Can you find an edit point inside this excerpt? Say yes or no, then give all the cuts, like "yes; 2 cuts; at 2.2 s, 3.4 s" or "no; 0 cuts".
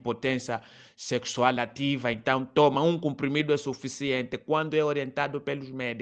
no; 0 cuts